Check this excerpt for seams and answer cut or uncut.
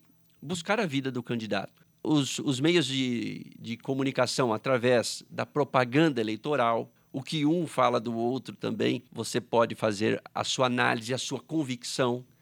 cut